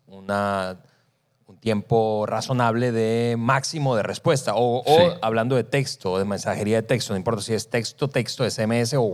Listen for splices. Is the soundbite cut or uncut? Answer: uncut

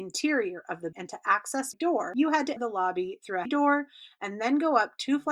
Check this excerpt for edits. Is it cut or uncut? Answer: cut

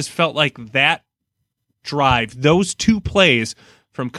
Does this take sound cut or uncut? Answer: uncut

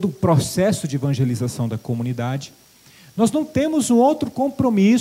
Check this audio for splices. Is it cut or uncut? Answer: uncut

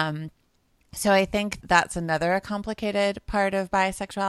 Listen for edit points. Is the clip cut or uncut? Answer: cut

